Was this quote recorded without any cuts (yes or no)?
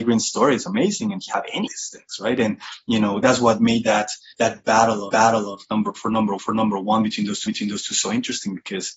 no